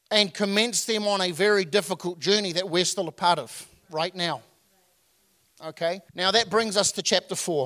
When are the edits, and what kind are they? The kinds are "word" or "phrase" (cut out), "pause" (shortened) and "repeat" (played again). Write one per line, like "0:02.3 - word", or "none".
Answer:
0:06.1 - pause